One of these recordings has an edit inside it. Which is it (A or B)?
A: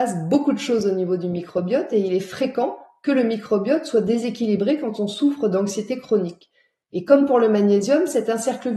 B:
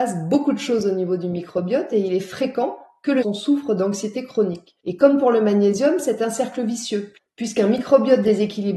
B